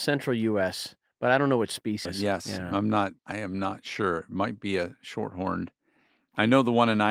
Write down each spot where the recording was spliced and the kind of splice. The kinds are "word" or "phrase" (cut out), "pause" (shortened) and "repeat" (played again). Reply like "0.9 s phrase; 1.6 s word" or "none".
2.1 s word; 3.2 s pause